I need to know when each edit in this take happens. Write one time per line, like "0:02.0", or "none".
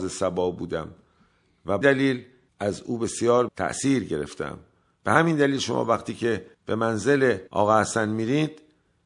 0:01.8
0:02.5
0:03.5
0:06.5
0:07.5